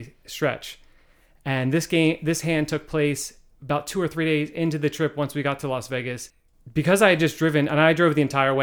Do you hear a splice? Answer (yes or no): no